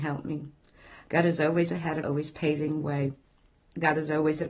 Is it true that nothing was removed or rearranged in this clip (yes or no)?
no